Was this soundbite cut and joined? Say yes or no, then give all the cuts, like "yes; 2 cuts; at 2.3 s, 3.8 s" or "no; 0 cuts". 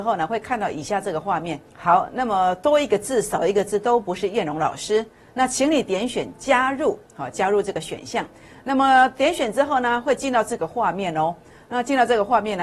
yes; 1 cut; at 1.7 s